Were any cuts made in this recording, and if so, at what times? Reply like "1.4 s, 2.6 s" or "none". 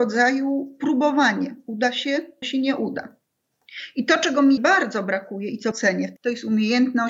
2.4 s, 4.6 s, 5.7 s, 6.2 s